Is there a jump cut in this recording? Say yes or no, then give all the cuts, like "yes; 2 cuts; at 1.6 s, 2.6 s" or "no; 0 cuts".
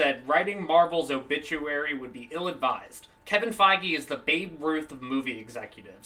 yes; 1 cut; at 3.2 s